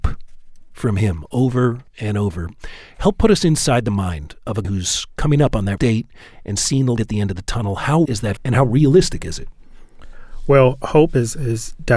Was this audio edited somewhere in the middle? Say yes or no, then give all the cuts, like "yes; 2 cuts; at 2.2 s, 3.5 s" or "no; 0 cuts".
yes; 6 cuts; at 1.9 s, 4.6 s, 5.8 s, 7.0 s, 8.1 s, 8.4 s